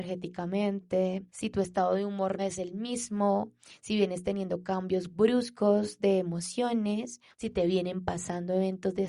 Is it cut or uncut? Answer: cut